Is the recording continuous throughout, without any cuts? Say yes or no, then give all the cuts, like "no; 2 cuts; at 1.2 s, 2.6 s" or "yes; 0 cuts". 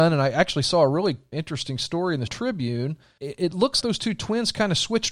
no; 4 cuts; at 1.3 s, 2.3 s, 3.2 s, 3.8 s